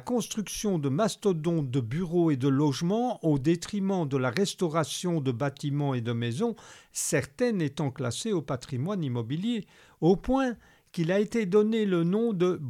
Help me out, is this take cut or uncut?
uncut